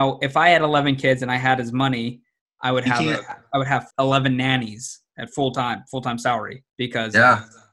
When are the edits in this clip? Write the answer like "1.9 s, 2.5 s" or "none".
3.9 s, 6.7 s